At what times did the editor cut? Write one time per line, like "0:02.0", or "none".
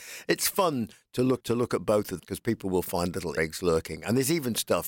0:01.4
0:02.2
0:03.4